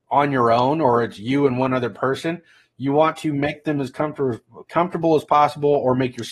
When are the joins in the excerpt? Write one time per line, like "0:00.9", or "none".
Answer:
none